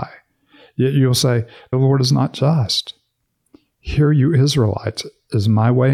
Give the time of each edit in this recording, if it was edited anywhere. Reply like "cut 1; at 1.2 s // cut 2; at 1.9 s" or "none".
cut 1; at 1.7 s